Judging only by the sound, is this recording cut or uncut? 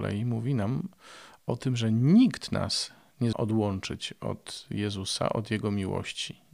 cut